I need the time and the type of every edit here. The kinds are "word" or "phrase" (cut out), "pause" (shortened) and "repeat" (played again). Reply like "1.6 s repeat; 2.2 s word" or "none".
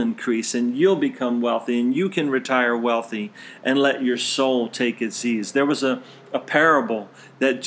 none